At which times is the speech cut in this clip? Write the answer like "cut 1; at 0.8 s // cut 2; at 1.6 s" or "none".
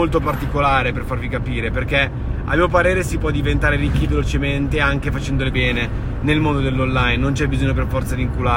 cut 1; at 5.5 s